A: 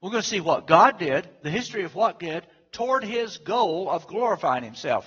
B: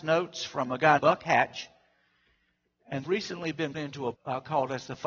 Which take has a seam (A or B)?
B